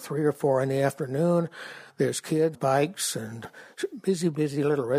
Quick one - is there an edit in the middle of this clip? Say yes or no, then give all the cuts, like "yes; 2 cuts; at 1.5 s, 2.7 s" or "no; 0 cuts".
yes; 2 cuts; at 2.5 s, 3.4 s